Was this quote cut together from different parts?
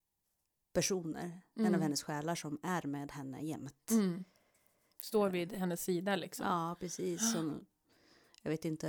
no; 0 cuts

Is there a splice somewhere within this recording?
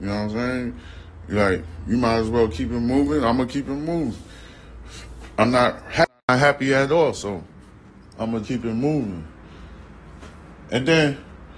yes; 1 cut; at 8.4 s

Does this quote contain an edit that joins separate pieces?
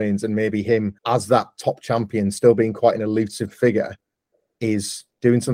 yes; 1 cut; at 1.0 s

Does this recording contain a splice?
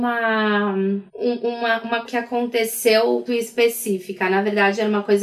yes; 3 cuts; at 1.1 s, 2.1 s, 3.3 s

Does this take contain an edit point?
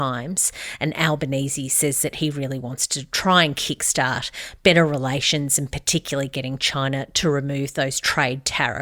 no; 0 cuts

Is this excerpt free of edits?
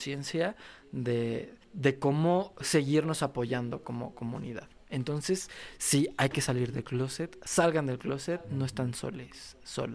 no; 1 cut; at 1.6 s

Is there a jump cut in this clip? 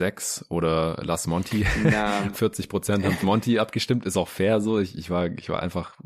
yes; 2 cuts; at 2.3 s, 3.2 s

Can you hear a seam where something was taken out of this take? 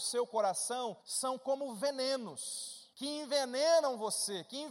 yes; 2 cuts; at 1.0 s, 2.9 s

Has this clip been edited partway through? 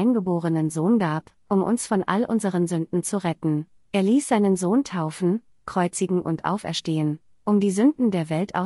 no; 0 cuts

